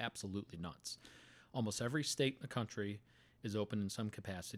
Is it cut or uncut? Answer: uncut